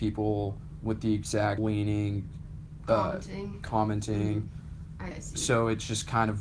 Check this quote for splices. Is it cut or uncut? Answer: cut